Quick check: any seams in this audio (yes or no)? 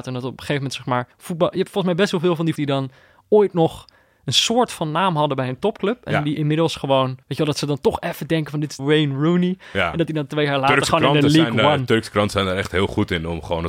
yes